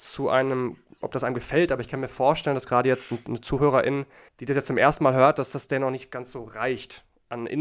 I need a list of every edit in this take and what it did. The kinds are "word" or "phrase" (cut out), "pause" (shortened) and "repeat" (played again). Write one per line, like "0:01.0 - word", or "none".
0:04.3 - pause